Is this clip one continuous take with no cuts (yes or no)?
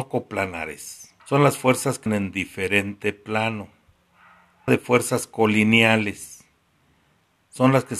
no